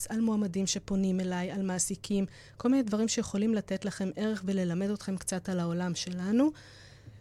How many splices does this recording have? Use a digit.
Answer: 0